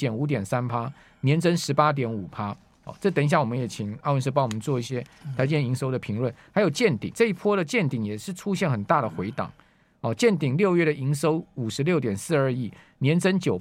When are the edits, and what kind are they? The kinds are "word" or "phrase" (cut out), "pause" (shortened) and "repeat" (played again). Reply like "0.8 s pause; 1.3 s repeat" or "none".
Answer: 7.1 s word